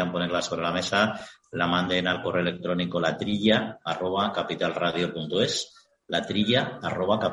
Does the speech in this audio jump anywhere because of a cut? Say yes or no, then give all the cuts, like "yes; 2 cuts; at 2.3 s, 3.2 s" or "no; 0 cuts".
no; 0 cuts